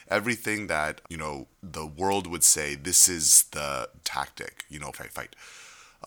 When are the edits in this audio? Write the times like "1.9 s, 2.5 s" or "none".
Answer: 1.0 s, 1.5 s, 4.0 s, 4.9 s